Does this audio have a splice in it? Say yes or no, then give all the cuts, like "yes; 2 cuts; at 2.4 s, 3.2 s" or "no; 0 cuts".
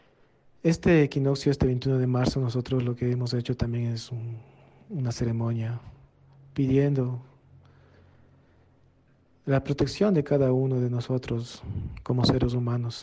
no; 0 cuts